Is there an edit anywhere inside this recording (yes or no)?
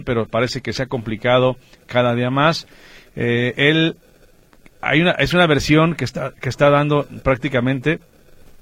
no